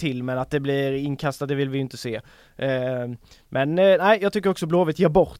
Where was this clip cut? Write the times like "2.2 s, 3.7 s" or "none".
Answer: none